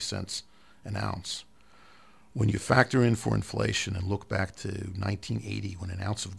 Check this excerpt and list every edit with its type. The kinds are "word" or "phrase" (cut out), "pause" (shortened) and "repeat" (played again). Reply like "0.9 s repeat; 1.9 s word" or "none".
none